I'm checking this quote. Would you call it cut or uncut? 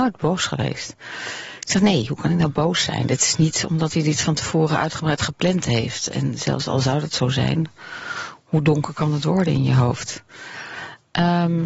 uncut